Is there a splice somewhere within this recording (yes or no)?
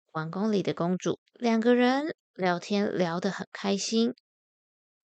yes